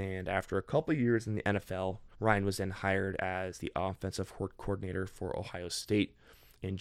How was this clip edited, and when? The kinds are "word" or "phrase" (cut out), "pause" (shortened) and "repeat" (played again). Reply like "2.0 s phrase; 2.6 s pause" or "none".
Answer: 2.1 s pause